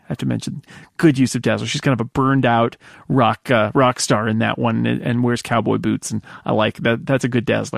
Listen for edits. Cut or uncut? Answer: uncut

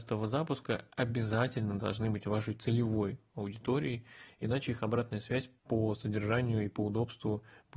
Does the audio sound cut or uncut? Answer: cut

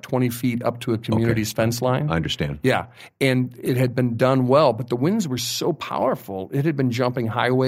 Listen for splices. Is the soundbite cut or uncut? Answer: uncut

